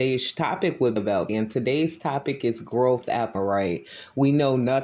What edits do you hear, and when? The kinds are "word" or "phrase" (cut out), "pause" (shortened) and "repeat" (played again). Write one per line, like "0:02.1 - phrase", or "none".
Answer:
0:01.0 - word
0:01.3 - word
0:03.3 - word